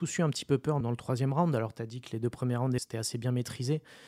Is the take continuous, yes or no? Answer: no